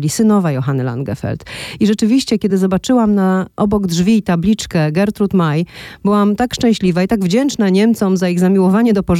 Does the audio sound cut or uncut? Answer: uncut